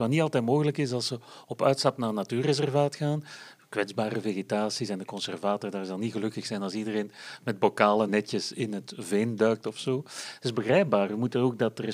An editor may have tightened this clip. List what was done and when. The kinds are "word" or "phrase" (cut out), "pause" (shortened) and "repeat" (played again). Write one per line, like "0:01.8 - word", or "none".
0:08.1 - word